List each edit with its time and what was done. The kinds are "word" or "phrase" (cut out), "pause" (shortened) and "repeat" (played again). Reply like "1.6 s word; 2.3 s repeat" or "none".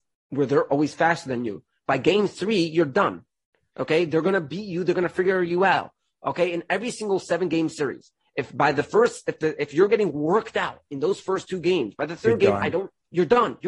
none